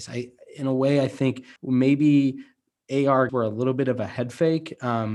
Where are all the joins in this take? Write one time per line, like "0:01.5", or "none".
0:01.6
0:03.3